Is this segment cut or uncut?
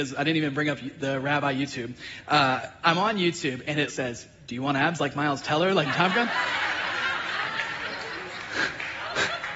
cut